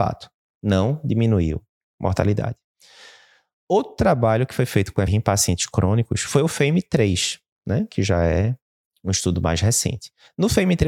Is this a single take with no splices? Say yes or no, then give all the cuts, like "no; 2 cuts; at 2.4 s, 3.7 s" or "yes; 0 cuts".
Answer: no; 1 cut; at 5.1 s